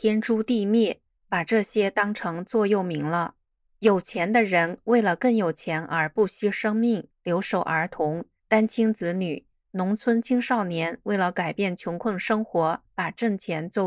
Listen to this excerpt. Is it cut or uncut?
cut